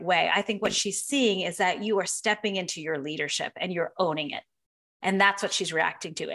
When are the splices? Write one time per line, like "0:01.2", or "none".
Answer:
none

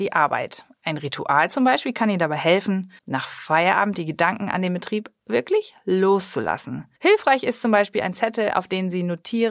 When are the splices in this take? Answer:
0:03.0
0:07.0

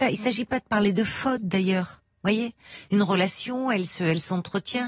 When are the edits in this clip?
none

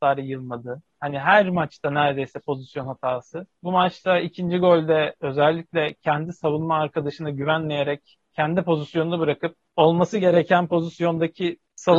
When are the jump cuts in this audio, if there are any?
0:08.2

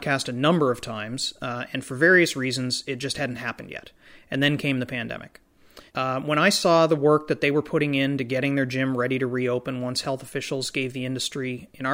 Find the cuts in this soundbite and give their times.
0:05.9

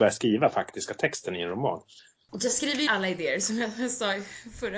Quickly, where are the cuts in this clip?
0:02.9

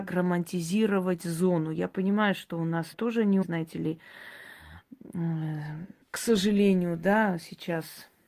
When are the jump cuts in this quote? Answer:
0:02.9
0:03.4
0:06.0

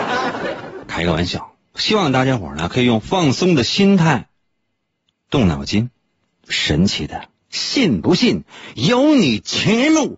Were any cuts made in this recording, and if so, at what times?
none

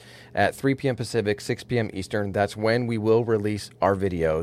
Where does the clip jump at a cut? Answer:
none

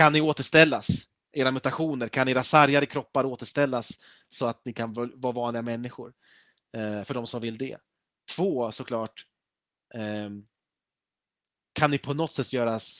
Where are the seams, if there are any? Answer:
none

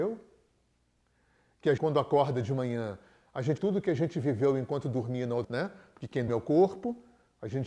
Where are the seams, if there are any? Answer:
0:01.8
0:03.6
0:05.4
0:06.3

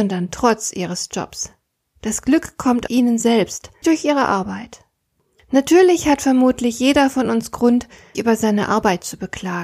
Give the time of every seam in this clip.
0:02.9
0:03.8
0:08.1

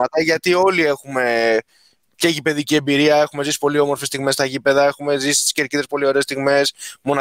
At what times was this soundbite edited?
none

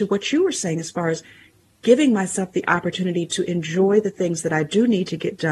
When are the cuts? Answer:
none

